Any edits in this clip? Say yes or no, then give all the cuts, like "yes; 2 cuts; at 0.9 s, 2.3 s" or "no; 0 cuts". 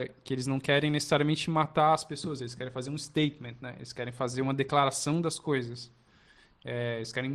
no; 0 cuts